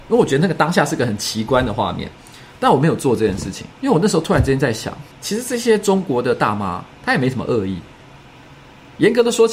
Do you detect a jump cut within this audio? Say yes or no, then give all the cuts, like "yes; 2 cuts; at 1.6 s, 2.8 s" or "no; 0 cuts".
yes; 3 cuts; at 3.7 s, 5.1 s, 6.9 s